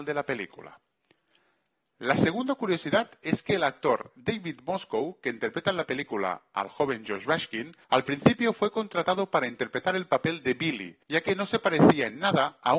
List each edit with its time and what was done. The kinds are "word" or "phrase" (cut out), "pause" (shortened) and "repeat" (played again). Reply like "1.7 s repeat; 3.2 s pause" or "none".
7.8 s pause; 11.0 s pause